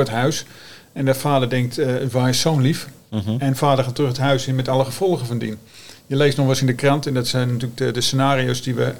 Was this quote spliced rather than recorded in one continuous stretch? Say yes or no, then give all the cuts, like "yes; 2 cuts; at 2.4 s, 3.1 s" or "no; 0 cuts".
no; 0 cuts